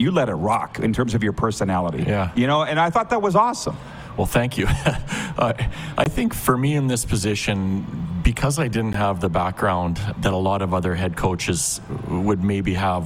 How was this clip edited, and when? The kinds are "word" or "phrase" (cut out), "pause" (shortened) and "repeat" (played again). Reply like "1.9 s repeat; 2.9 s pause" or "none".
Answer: 6.3 s word; 10.2 s word